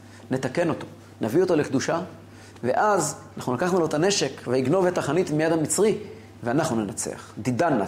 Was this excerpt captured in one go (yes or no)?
yes